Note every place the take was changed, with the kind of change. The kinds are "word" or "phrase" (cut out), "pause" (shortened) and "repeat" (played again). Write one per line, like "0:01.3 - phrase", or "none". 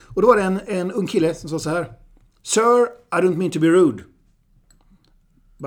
none